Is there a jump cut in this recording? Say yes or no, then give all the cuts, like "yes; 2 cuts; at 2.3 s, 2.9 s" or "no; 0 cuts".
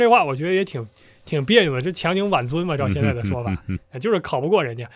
no; 0 cuts